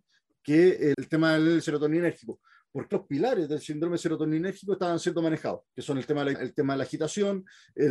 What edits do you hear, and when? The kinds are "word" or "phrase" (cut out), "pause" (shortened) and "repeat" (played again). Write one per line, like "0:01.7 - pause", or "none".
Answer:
0:00.9 - word
0:01.6 - word
0:02.9 - word
0:05.7 - pause
0:06.3 - word